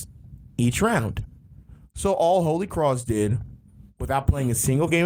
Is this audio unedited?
yes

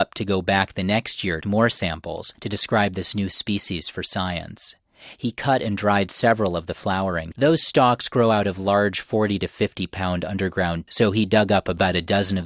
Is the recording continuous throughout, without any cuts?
no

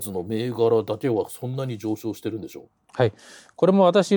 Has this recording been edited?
no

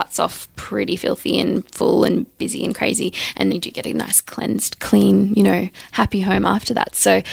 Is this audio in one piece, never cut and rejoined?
no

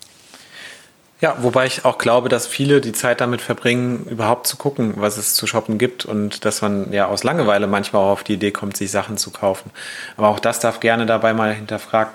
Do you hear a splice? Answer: no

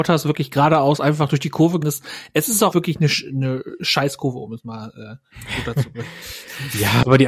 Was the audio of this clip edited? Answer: yes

